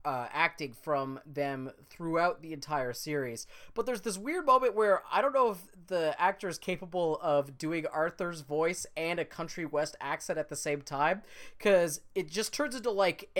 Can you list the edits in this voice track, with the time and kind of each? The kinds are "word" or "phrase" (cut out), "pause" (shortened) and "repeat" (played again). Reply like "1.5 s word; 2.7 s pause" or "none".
none